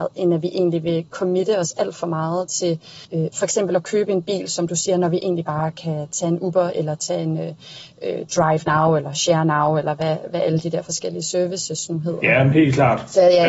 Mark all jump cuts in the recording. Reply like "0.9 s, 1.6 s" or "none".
3.0 s